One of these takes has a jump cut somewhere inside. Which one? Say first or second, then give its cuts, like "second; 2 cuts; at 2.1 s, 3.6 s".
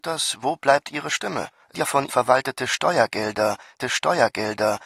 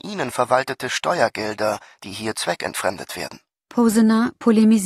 first; 3 cuts; at 1.7 s, 2.1 s, 3.8 s